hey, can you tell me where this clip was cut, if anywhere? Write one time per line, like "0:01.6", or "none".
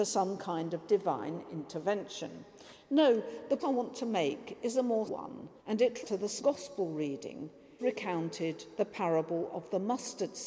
0:03.6
0:05.1
0:05.6
0:06.0
0:06.4
0:07.8